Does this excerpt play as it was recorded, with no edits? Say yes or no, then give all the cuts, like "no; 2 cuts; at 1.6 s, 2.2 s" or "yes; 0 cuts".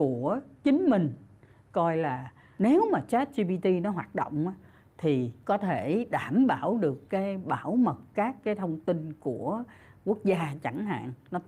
yes; 0 cuts